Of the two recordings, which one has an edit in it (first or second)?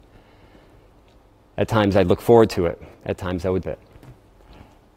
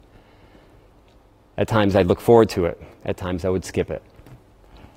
first